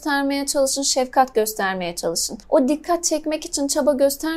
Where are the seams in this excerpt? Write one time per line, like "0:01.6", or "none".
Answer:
0:02.4